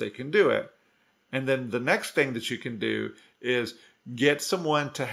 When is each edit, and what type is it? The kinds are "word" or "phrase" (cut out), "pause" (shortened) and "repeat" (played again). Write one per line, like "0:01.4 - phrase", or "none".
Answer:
none